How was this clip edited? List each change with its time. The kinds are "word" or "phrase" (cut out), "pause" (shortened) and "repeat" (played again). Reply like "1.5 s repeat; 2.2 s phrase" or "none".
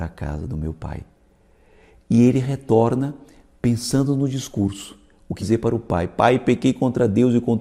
5.4 s word